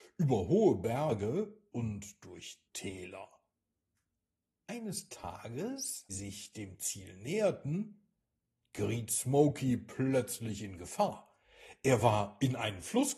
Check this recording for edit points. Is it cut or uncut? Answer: cut